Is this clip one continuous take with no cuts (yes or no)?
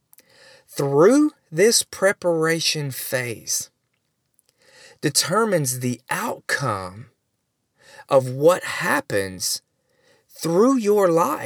yes